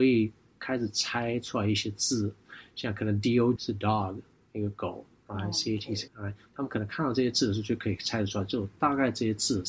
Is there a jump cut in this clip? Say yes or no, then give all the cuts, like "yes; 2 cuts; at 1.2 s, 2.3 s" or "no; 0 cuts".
yes; 2 cuts; at 3.6 s, 6.1 s